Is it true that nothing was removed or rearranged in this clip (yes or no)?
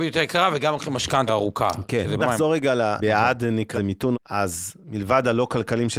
no